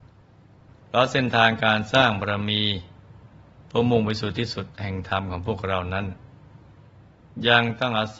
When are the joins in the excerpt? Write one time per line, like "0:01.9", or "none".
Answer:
none

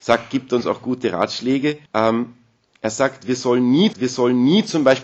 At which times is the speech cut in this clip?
0:01.9
0:03.9

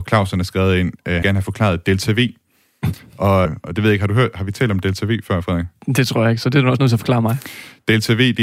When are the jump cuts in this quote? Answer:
0:01.2
0:03.4

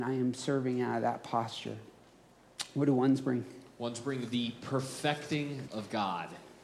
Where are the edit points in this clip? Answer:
0:05.7

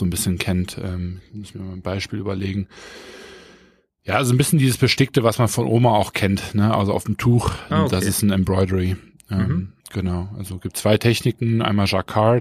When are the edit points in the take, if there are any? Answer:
0:07.7
0:09.8

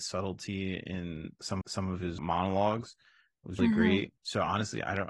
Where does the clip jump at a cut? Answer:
0:01.6
0:02.2
0:03.6

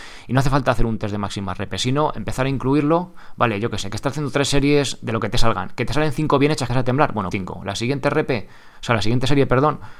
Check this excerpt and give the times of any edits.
0:06.7
0:07.3

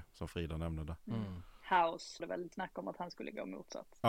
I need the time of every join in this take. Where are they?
0:02.2
0:02.5

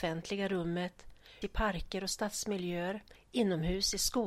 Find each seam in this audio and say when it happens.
0:01.4

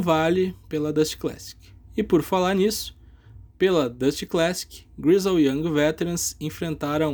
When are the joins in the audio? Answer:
0:01.8

